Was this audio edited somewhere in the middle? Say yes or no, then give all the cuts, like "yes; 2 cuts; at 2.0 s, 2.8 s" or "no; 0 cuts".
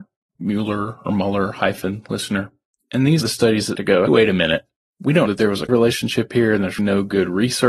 yes; 6 cuts; at 3.2 s, 3.8 s, 4.1 s, 5.3 s, 5.7 s, 6.8 s